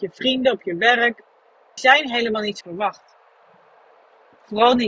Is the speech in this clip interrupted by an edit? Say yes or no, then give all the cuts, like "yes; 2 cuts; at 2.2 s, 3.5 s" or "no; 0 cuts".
yes; 2 cuts; at 1.8 s, 2.6 s